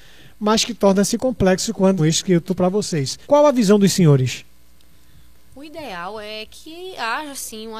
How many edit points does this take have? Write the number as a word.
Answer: three